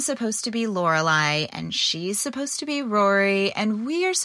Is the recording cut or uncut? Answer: uncut